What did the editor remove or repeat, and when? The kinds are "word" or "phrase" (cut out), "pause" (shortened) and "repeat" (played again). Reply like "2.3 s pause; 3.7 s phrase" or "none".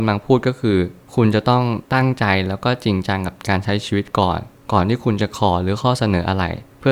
1.8 s pause